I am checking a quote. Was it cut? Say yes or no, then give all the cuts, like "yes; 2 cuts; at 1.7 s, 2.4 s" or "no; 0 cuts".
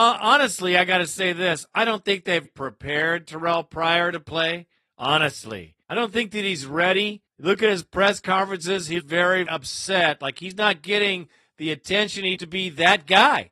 yes; 6 cuts; at 2.4 s, 5.8 s, 7.3 s, 9.0 s, 9.5 s, 12.4 s